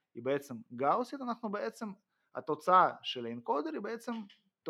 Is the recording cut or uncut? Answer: uncut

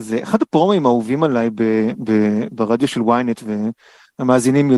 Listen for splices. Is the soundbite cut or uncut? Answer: uncut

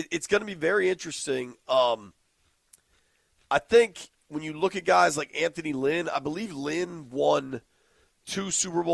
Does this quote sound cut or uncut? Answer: uncut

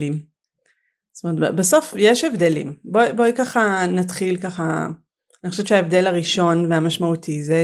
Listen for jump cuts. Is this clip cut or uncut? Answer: uncut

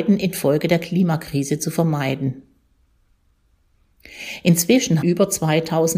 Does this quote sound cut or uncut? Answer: cut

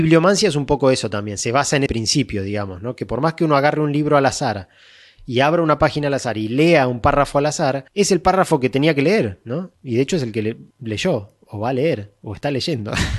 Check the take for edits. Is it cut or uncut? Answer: cut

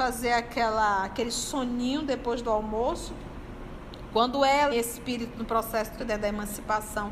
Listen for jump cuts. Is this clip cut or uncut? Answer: cut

